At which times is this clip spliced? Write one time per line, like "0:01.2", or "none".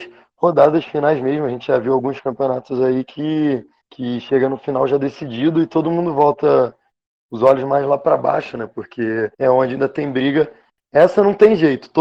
0:09.3